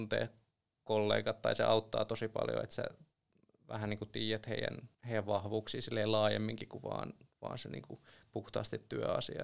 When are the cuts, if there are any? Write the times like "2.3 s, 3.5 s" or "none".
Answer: 4.9 s